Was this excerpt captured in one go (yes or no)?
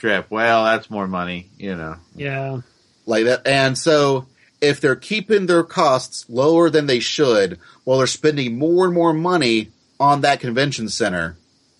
yes